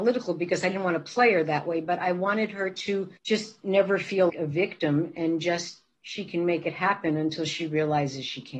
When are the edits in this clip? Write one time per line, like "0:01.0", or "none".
0:03.2
0:04.3
0:06.0